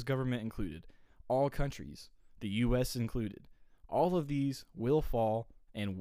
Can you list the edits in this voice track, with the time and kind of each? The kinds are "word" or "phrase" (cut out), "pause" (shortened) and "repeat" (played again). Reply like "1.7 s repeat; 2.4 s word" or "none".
none